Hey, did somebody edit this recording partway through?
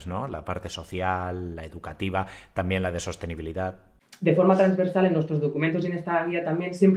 no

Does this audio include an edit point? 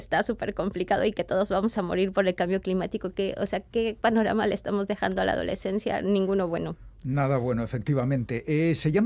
no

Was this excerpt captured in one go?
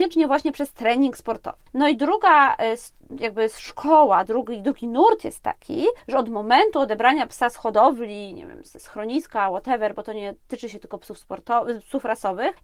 yes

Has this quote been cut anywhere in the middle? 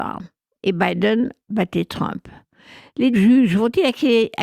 yes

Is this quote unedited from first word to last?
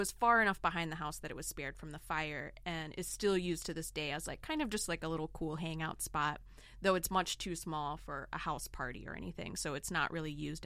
yes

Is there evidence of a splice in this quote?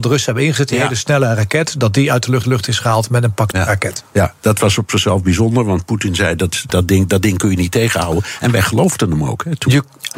yes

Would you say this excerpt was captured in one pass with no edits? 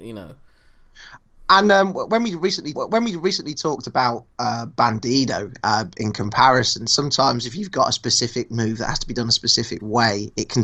no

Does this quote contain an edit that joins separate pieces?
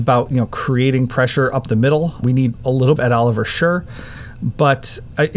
yes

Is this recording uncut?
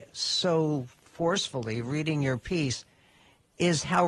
yes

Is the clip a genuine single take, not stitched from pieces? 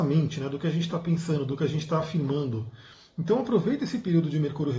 yes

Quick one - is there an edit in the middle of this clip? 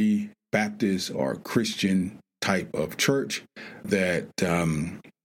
yes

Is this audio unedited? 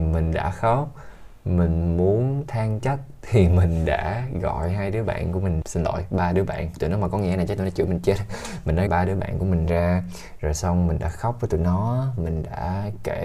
no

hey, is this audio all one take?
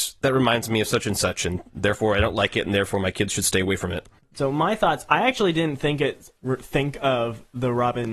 yes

